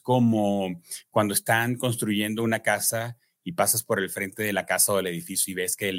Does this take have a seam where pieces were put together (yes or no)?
no